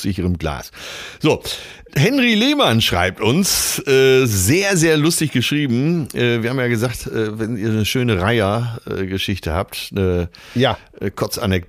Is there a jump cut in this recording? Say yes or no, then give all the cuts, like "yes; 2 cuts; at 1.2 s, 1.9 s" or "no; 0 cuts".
no; 0 cuts